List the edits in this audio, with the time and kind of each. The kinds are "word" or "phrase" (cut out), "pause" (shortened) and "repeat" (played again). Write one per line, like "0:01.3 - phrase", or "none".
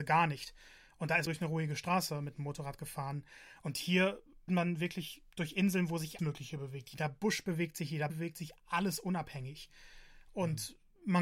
0:01.3 - phrase
0:04.5 - word
0:06.2 - word
0:08.1 - word